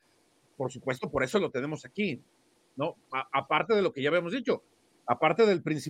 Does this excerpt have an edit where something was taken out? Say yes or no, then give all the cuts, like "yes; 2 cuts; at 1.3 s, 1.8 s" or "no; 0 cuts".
no; 0 cuts